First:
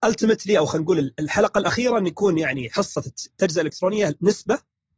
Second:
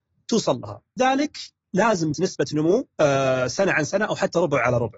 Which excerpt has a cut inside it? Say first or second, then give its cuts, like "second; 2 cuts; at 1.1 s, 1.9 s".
second; 3 cuts; at 1.0 s, 2.1 s, 2.9 s